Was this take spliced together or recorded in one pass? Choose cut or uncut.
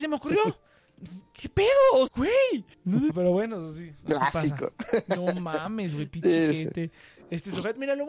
cut